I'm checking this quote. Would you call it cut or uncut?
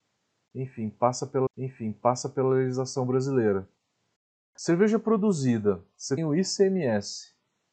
cut